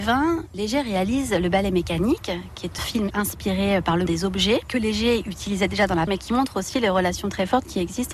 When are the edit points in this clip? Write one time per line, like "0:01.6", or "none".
0:02.8
0:03.1
0:04.1
0:06.1